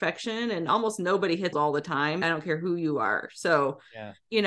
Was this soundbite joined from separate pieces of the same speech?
yes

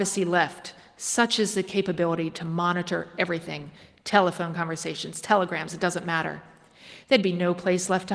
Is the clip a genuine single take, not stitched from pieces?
yes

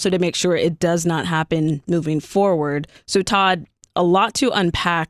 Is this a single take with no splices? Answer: yes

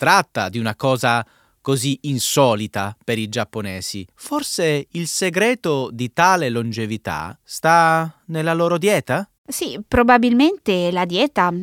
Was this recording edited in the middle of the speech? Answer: yes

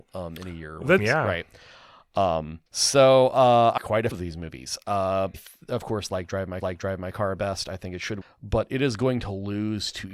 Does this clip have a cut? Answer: yes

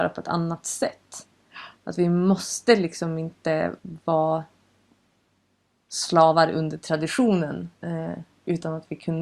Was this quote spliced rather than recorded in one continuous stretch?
yes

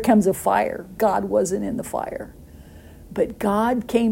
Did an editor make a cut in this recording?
yes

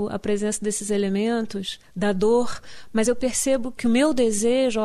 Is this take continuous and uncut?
yes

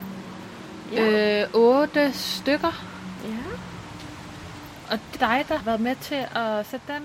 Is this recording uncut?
no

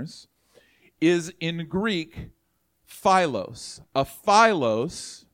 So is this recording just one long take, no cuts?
yes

